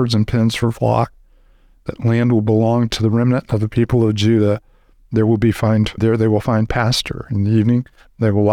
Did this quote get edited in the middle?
yes; 1 cut; at 6.0 s

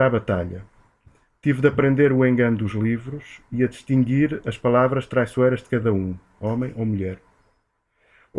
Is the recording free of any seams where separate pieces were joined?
yes; 0 cuts

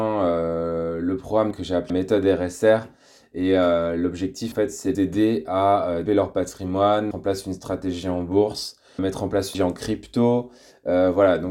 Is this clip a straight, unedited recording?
no; 8 cuts; at 1.5 s, 1.9 s, 4.5 s, 4.9 s, 6.1 s, 7.1 s, 9.0 s, 9.5 s

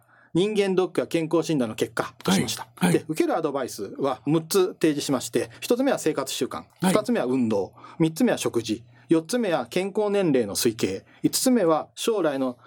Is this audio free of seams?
yes; 0 cuts

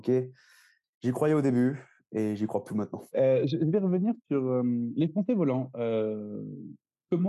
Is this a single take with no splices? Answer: no; 3 cuts; at 2.7 s, 3.1 s, 4.2 s

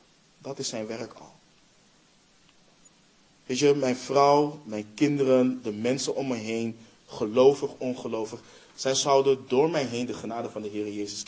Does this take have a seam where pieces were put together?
no; 0 cuts

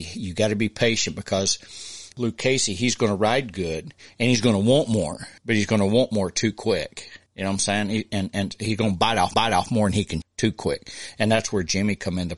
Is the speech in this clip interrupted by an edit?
yes; 4 cuts; at 5.4 s, 7.3 s, 9.3 s, 10.2 s

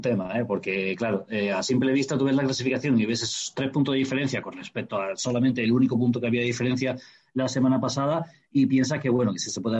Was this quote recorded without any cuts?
yes; 0 cuts

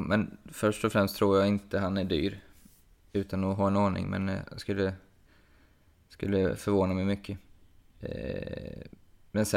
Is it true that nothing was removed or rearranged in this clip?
yes; 0 cuts

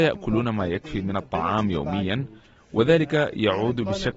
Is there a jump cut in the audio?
no; 0 cuts

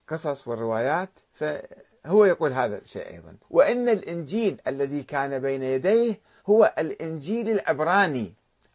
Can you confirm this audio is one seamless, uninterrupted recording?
no; 2 cuts; at 3.4 s, 6.4 s

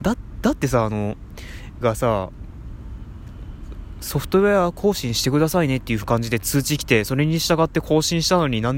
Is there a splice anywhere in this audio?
yes; 1 cut; at 1.8 s

